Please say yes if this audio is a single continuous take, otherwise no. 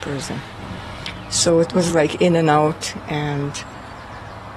yes